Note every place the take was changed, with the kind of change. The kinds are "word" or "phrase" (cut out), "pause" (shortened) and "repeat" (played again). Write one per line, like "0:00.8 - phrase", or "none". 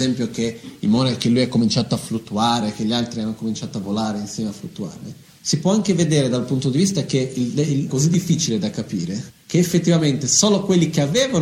0:05.4 - pause
0:07.9 - phrase
0:09.4 - pause